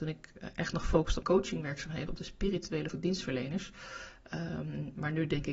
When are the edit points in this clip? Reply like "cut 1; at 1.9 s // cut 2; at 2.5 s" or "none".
cut 1; at 1.2 s // cut 2; at 2.1 s // cut 3; at 2.9 s